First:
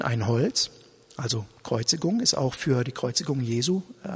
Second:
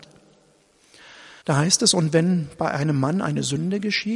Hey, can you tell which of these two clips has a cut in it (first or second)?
second